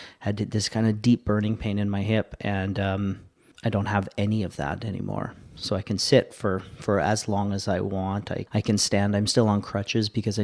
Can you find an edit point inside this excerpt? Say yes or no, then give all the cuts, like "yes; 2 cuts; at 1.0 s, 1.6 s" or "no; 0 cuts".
no; 0 cuts